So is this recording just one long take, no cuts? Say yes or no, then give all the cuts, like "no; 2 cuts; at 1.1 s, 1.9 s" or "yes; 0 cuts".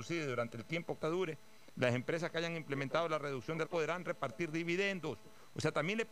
no; 2 cuts; at 1.0 s, 3.6 s